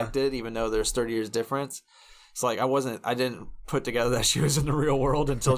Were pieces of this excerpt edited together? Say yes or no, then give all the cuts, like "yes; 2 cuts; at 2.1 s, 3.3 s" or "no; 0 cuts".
no; 0 cuts